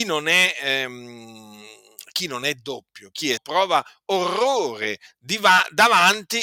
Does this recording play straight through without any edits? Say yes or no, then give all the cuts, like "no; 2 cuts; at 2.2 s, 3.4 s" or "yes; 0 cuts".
no; 1 cut; at 3.4 s